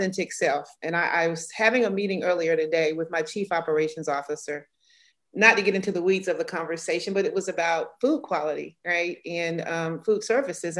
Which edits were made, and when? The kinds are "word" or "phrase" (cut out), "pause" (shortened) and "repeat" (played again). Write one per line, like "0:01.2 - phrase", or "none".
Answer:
none